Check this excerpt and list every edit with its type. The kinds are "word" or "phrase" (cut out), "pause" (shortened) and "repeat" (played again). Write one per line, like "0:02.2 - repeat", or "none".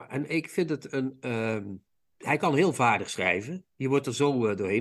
none